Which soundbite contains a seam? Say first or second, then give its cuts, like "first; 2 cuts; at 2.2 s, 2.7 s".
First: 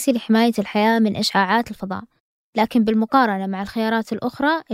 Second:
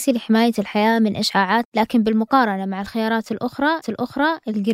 second; 2 cuts; at 1.6 s, 3.8 s